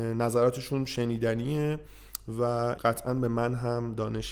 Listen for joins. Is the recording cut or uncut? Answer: cut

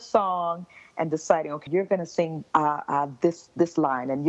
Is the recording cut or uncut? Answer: cut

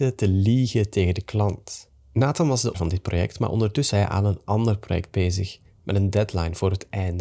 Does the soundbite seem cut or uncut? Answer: cut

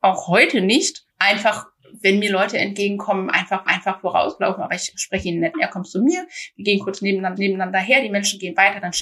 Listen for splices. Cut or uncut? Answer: cut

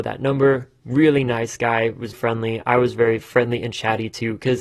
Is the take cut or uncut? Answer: cut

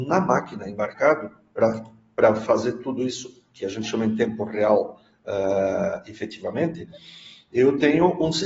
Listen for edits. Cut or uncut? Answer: uncut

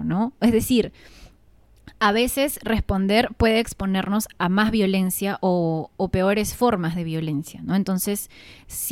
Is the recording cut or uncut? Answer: uncut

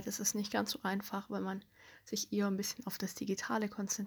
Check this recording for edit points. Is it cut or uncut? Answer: uncut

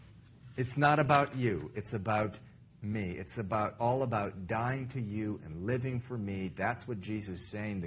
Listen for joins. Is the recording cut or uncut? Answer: uncut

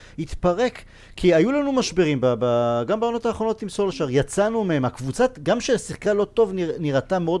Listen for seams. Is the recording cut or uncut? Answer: uncut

